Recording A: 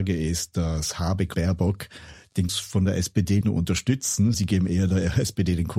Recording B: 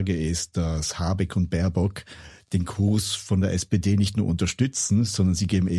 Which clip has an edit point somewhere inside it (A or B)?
A